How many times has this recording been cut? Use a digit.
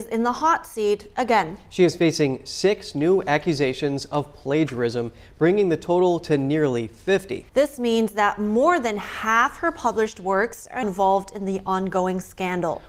2